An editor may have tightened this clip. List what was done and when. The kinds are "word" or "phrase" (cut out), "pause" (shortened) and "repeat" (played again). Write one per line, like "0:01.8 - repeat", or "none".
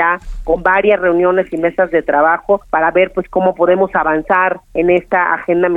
0:02.6 - pause
0:04.6 - pause